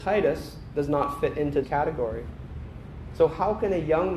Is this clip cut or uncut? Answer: cut